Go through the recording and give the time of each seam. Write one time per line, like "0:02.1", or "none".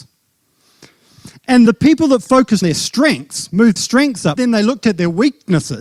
0:01.7
0:02.6
0:03.8
0:04.4